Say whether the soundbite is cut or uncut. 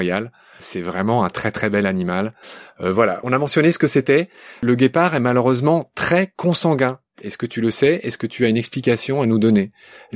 uncut